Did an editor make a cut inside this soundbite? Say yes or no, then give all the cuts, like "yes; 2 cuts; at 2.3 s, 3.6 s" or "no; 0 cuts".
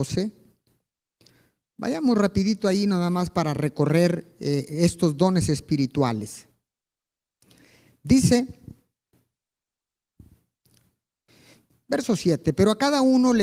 no; 0 cuts